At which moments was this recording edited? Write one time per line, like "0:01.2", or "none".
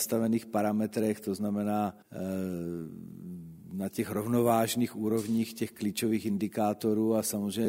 0:02.0